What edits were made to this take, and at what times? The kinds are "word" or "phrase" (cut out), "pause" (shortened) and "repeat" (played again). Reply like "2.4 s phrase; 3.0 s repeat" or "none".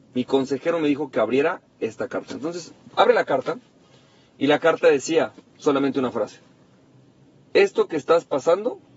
none